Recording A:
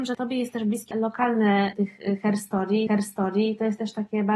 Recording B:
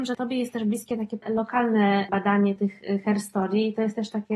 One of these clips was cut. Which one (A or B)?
A